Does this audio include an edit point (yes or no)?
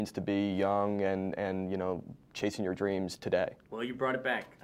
yes